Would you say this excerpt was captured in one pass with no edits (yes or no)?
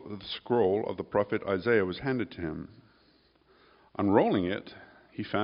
yes